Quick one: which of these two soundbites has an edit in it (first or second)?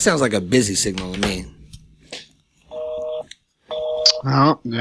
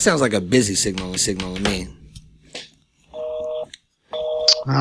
second